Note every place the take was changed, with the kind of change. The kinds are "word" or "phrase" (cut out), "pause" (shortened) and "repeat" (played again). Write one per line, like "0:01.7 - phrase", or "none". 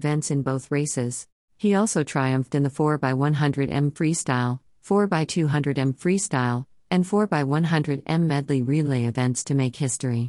0:01.4 - pause